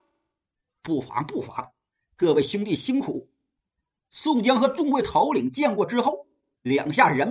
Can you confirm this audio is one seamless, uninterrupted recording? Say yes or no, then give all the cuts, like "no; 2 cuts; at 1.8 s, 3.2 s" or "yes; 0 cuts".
yes; 0 cuts